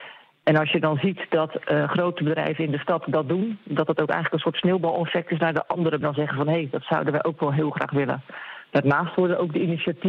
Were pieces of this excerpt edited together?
yes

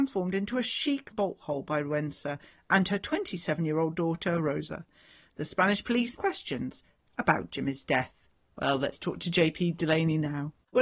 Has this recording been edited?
yes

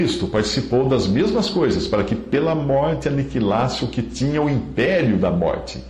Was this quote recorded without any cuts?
yes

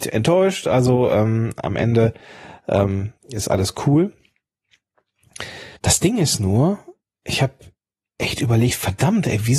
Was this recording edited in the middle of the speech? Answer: yes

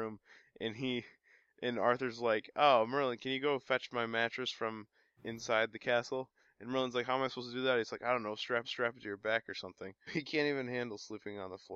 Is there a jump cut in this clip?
yes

